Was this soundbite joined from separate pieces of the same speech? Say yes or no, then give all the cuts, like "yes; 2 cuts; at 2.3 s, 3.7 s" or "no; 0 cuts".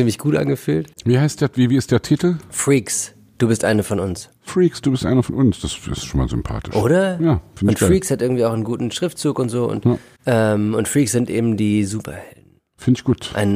yes; 3 cuts; at 0.9 s, 10.2 s, 12.6 s